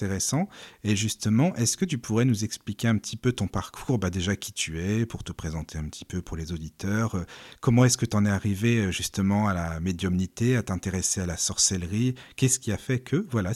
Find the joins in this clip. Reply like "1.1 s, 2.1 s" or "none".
none